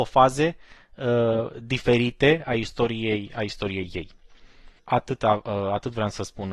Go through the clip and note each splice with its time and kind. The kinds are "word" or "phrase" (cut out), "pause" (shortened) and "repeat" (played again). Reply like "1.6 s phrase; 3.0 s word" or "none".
4.8 s pause